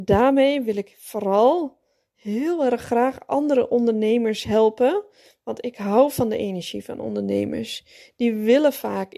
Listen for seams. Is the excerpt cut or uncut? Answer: uncut